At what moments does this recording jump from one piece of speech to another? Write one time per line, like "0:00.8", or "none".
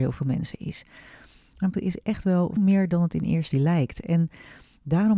0:01.7
0:02.6
0:03.5